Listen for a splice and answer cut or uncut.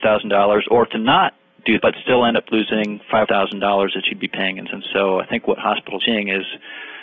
cut